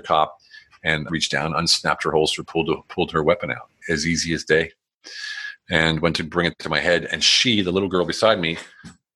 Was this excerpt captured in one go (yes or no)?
no